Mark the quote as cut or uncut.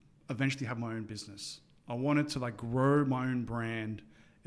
uncut